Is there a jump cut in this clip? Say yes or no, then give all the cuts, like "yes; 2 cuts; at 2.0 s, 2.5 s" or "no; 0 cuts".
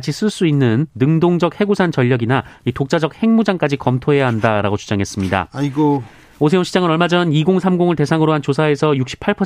no; 0 cuts